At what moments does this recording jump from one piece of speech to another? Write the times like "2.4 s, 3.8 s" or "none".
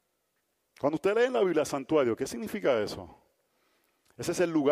none

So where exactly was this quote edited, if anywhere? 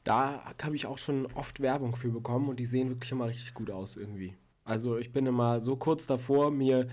none

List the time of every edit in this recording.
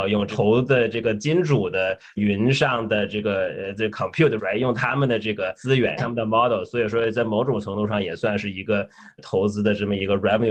4.4 s, 6.0 s

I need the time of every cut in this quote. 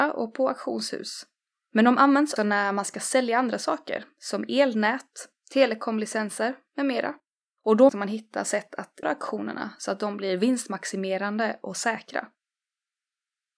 2.4 s, 7.9 s, 9.0 s

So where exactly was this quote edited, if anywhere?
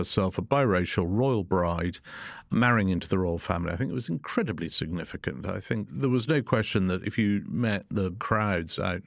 none

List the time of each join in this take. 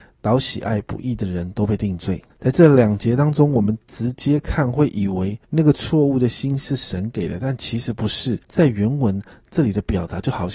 2.3 s, 5.4 s, 8.4 s

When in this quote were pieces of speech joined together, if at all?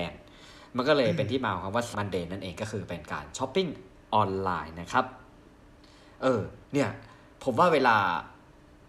1.9 s, 6.6 s

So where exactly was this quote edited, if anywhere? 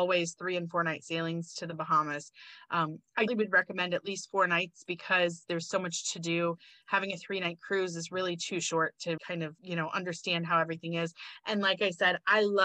3.3 s, 9.2 s, 9.6 s

